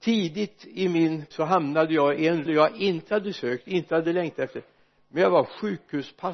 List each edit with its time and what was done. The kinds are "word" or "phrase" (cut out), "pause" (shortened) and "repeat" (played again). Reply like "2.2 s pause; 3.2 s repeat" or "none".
1.3 s word; 2.5 s word